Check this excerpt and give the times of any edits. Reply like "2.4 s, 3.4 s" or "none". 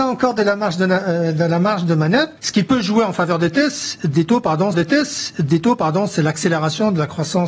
2.4 s, 4.7 s